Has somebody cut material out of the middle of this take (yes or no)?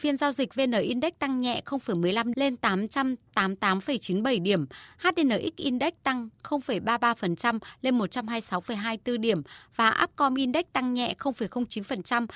yes